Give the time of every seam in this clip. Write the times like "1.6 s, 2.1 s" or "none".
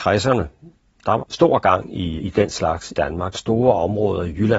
1.2 s, 2.2 s, 2.9 s, 3.3 s